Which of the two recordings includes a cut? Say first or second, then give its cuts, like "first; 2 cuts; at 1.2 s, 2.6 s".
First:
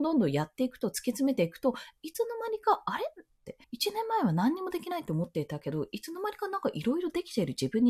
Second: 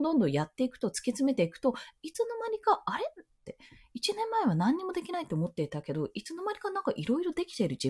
first; 1 cut; at 3.6 s